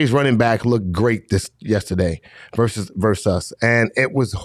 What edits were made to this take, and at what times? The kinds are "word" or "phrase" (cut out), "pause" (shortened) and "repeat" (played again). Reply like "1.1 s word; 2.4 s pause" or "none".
none